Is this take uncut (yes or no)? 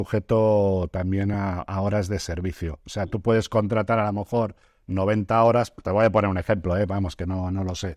yes